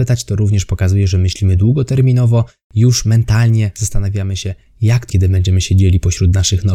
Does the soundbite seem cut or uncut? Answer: cut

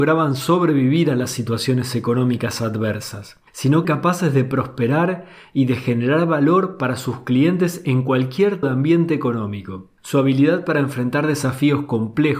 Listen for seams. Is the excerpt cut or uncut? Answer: cut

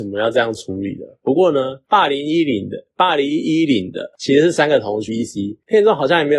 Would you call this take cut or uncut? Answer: cut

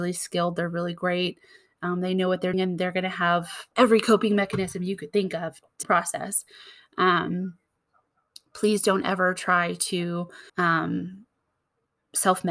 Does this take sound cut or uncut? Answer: cut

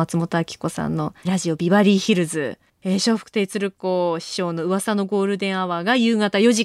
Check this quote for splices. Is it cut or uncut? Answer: cut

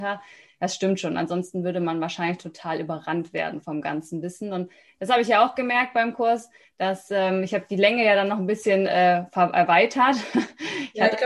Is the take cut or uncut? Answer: uncut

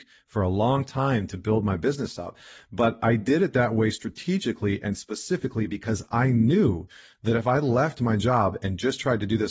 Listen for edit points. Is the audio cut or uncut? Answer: uncut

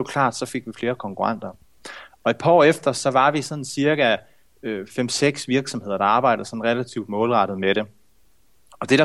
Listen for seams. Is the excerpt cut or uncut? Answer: uncut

